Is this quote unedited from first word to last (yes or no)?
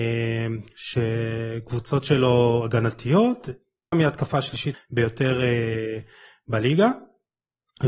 no